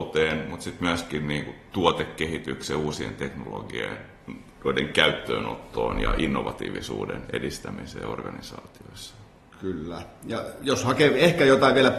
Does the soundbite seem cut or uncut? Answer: uncut